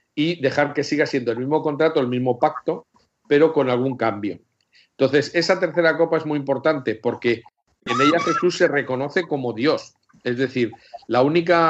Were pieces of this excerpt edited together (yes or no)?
no